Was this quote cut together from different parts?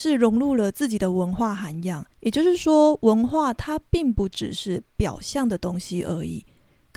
yes; 1 cut; at 2.1 s

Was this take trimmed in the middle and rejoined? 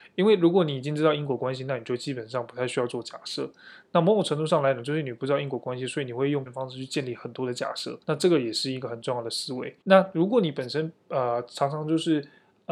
yes; 3 cuts; at 6.5 s, 8.0 s, 9.8 s

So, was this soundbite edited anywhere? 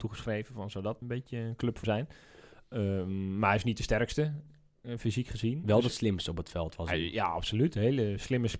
yes; 2 cuts; at 1.0 s, 1.8 s

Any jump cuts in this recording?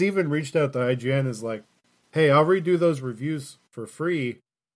no; 0 cuts

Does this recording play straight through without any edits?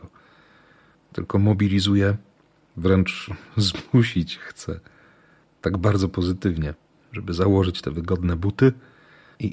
yes; 0 cuts

